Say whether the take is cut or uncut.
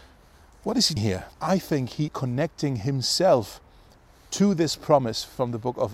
cut